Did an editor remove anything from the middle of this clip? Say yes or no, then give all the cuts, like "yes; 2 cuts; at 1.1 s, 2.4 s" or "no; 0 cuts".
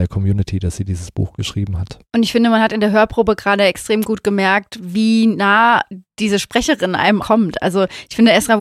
yes; 2 cuts; at 2.0 s, 7.2 s